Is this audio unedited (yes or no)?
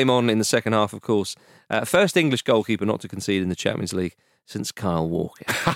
yes